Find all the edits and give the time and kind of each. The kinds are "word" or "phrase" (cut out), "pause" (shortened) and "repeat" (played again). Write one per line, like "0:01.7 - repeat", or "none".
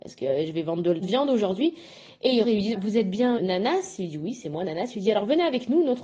0:01.0 - word
0:02.4 - word
0:02.7 - word
0:03.4 - word